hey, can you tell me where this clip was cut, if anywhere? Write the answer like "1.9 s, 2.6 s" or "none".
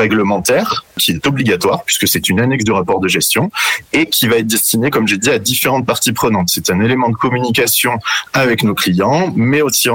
none